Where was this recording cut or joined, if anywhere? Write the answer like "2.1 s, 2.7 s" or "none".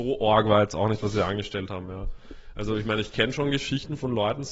none